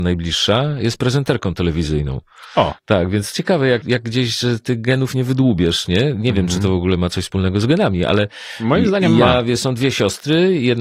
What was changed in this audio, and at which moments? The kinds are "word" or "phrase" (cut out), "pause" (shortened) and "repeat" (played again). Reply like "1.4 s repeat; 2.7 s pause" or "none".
2.8 s pause; 3.3 s word; 3.8 s word